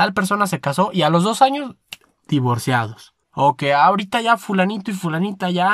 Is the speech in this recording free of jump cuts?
no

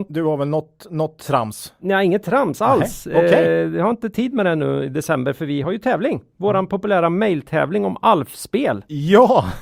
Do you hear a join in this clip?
no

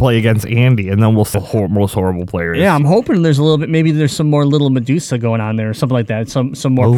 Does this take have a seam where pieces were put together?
yes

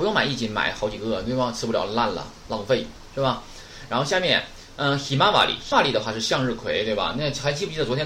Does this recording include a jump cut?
yes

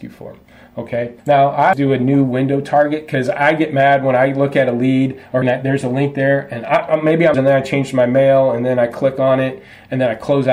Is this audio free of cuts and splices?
no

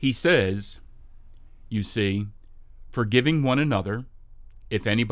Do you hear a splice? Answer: no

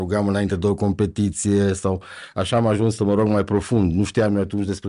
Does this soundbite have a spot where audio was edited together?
no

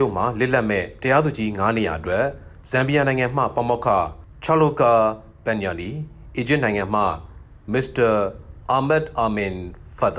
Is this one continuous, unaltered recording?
yes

